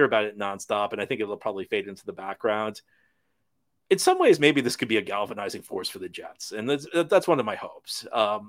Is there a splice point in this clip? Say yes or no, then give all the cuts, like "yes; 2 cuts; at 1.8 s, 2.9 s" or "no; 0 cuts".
no; 0 cuts